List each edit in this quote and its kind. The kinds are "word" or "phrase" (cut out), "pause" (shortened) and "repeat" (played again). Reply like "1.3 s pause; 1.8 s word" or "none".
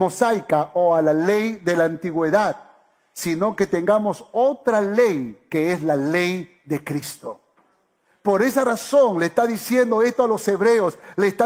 none